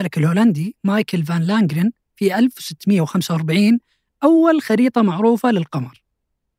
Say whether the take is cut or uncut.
uncut